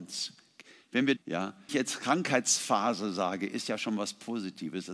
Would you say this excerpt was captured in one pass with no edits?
no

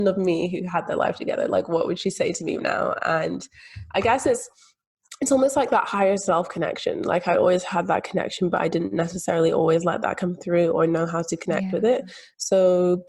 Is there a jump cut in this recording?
yes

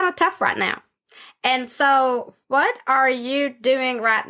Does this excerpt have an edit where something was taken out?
no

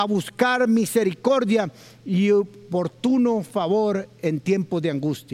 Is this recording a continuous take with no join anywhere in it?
yes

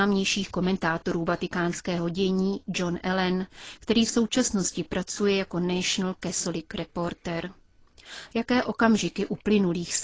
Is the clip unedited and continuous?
yes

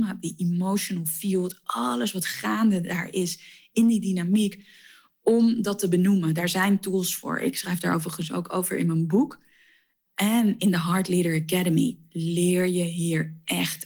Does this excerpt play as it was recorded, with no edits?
yes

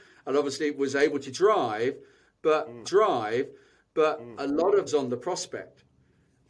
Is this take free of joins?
no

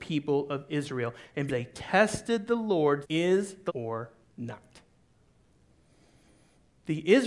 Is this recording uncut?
no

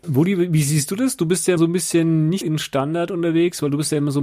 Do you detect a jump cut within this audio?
yes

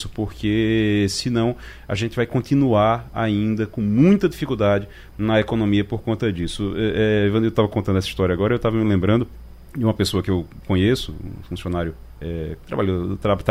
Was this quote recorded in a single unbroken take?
yes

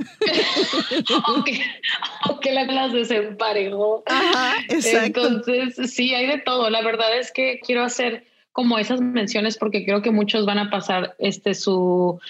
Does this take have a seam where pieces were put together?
yes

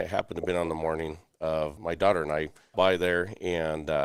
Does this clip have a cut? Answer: yes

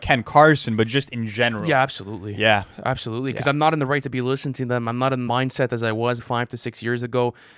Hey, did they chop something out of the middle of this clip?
yes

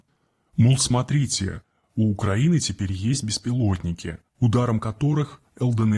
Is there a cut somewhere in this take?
no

